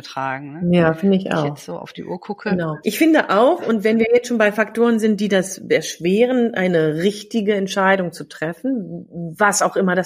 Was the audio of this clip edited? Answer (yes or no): no